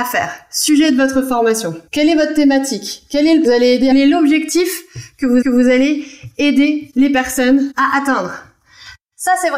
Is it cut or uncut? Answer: cut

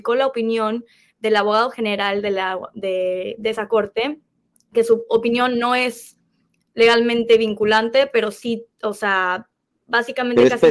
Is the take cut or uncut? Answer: uncut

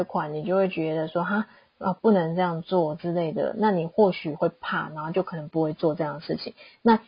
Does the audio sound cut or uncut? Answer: uncut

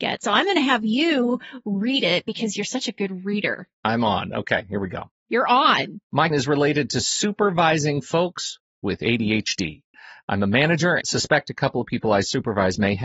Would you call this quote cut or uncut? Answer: cut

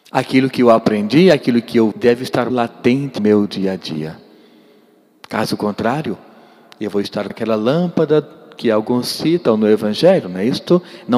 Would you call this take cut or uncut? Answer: cut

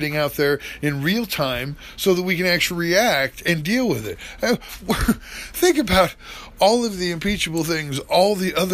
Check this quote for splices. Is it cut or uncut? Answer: uncut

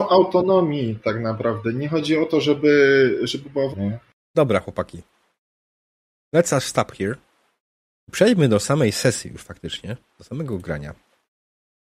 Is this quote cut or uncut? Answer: cut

